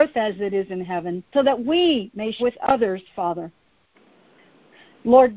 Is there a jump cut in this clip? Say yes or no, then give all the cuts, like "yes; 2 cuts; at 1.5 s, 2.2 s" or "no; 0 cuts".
yes; 2 cuts; at 1.3 s, 2.4 s